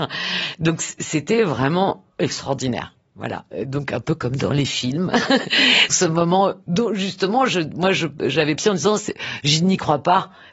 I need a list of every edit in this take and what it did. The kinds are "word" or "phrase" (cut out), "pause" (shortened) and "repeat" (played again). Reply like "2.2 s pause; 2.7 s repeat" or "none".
5.9 s word; 8.6 s phrase